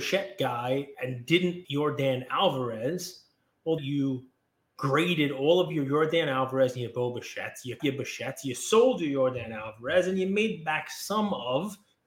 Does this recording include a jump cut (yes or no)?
yes